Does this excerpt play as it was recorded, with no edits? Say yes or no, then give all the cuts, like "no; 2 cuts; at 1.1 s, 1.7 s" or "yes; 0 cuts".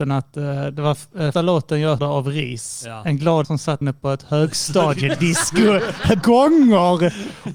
no; 5 cuts; at 1.3 s, 2.0 s, 3.4 s, 3.8 s, 6.2 s